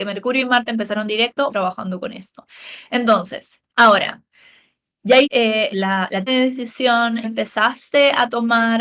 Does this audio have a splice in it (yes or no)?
yes